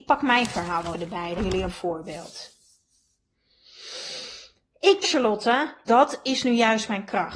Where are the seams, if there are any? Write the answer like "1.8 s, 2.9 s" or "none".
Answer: 0.9 s, 1.4 s, 1.7 s, 5.0 s, 5.9 s